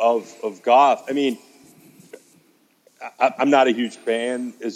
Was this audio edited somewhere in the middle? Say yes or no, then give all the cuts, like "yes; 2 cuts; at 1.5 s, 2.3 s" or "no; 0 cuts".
no; 0 cuts